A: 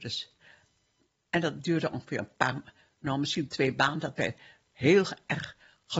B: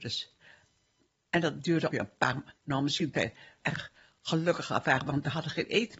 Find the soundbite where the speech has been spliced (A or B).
B